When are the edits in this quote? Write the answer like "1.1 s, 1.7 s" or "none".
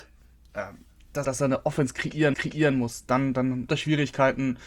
1.2 s, 2.3 s, 3.7 s